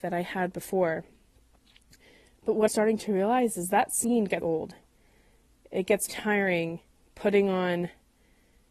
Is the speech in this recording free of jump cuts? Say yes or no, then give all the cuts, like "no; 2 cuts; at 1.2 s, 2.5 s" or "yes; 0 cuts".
no; 3 cuts; at 2.7 s, 4.4 s, 6.1 s